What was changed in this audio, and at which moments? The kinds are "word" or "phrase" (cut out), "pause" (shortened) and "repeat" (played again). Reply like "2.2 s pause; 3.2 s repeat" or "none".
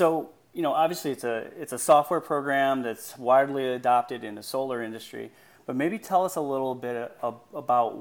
none